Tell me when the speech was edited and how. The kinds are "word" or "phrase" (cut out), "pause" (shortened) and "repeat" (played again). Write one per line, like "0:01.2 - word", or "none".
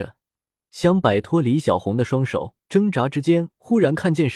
0:02.6 - pause